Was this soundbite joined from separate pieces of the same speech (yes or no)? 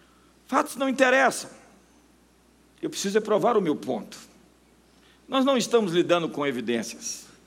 no